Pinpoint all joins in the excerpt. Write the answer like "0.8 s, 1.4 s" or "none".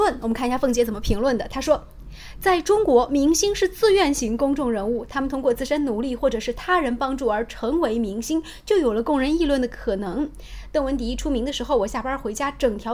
none